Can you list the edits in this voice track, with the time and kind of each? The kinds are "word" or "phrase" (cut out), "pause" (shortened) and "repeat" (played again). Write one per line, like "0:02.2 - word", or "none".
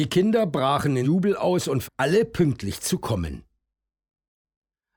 0:01.0 - word
0:01.8 - word